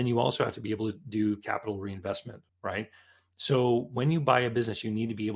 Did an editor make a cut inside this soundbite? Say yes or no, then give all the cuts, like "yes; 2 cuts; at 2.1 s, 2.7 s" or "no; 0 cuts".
yes; 1 cut; at 2.5 s